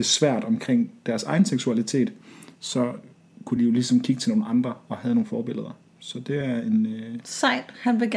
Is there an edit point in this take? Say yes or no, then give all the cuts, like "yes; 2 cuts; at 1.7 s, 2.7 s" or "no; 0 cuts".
no; 0 cuts